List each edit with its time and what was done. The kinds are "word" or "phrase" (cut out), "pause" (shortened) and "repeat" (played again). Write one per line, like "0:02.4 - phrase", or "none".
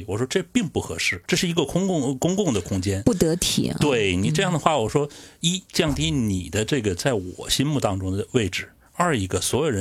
0:01.3 - pause
0:05.7 - pause